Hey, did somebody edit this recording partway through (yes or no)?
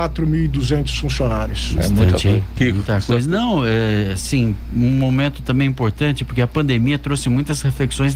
no